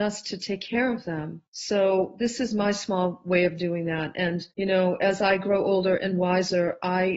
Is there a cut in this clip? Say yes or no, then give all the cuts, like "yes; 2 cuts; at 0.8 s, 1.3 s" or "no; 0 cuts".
yes; 2 cuts; at 1.5 s, 4.5 s